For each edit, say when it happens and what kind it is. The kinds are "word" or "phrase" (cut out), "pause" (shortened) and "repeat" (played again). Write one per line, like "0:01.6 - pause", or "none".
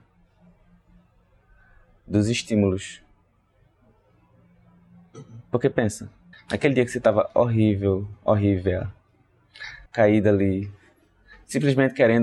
0:05.7 - phrase
0:06.3 - pause
0:09.9 - pause